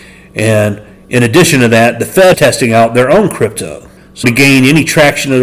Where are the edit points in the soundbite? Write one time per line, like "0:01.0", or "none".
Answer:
0:02.3
0:04.2